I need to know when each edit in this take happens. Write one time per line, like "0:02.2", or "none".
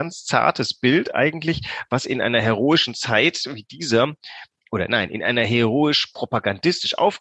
none